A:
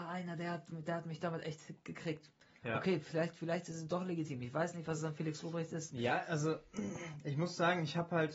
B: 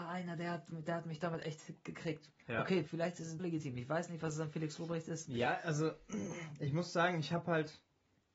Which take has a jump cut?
B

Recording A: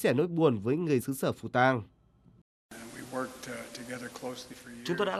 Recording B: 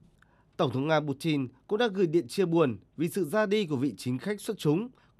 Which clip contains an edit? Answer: A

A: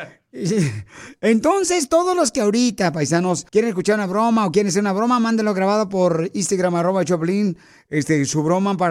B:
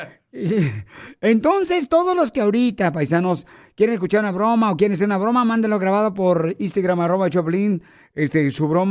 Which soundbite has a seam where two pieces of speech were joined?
A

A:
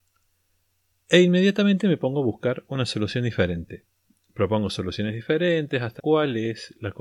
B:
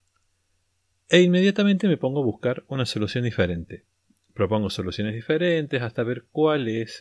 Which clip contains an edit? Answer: A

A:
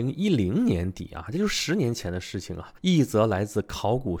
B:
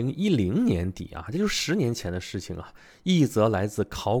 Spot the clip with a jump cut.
A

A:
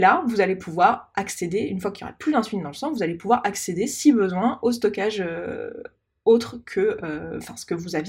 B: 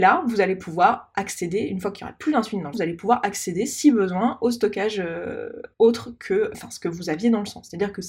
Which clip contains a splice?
B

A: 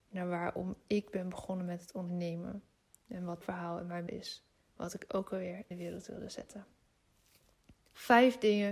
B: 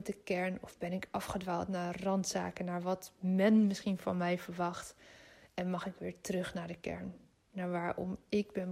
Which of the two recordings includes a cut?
A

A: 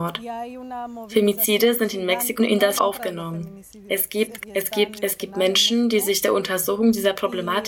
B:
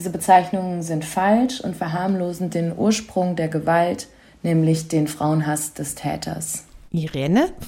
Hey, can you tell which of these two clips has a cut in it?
A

